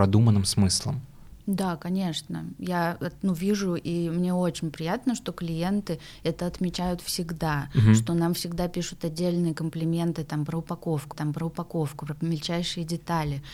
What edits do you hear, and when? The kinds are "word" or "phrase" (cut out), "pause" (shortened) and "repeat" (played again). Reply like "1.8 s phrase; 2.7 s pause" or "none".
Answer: 11.1 s repeat